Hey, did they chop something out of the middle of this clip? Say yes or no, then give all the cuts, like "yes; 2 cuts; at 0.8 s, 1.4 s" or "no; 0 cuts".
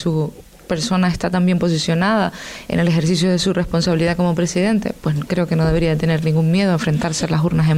no; 0 cuts